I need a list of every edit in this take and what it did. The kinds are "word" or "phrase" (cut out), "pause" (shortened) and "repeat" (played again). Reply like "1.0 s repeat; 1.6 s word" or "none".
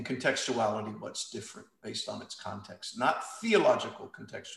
none